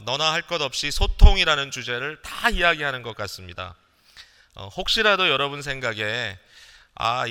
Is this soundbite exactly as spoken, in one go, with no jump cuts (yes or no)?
yes